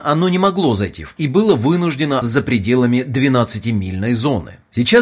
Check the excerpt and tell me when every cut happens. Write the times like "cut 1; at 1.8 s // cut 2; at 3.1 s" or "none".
cut 1; at 1.2 s // cut 2; at 2.2 s